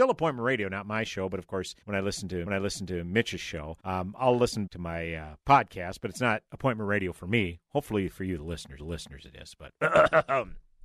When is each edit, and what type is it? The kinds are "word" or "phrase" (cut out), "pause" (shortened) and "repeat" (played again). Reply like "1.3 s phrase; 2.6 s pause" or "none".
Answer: 1.8 s pause; 2.5 s repeat; 3.8 s pause; 4.7 s word; 5.4 s pause; 6.5 s pause; 8.8 s repeat